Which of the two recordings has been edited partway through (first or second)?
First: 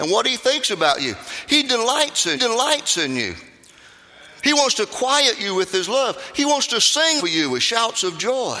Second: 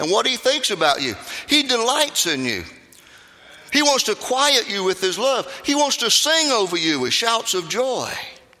first